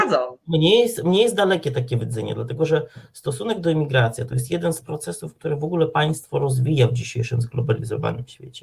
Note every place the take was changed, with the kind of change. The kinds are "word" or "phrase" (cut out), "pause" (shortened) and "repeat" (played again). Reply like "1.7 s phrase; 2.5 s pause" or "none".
none